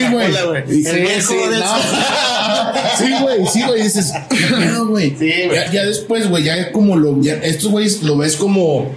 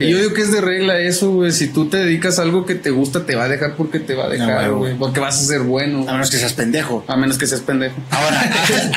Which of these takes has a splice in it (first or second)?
first